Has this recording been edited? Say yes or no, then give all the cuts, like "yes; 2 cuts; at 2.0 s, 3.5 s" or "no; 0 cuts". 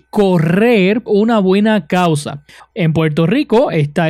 yes; 1 cut; at 1.1 s